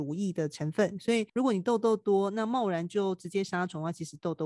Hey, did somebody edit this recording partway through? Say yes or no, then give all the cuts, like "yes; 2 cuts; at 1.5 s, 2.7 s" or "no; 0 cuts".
yes; 1 cut; at 1.3 s